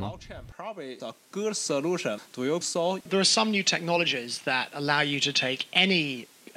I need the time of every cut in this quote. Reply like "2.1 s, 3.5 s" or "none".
1.0 s, 2.6 s